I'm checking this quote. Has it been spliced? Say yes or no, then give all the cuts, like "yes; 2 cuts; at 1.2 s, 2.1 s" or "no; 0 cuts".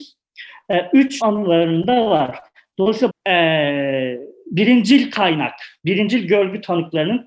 yes; 2 cuts; at 1.2 s, 3.1 s